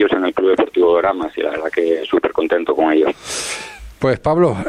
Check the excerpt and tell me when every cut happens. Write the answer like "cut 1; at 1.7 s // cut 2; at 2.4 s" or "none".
none